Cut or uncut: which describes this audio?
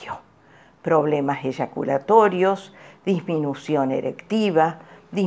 uncut